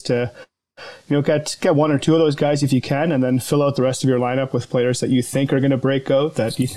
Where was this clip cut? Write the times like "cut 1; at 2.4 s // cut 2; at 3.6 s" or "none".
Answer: none